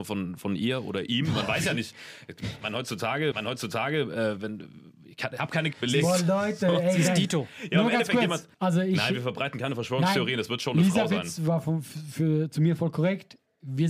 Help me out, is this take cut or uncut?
cut